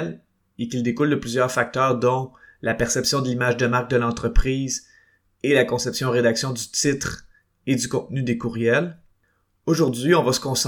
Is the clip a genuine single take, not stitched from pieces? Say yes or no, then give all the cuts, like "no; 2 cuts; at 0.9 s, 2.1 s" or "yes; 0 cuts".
yes; 0 cuts